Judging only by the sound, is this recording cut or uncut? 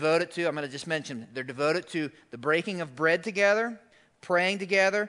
uncut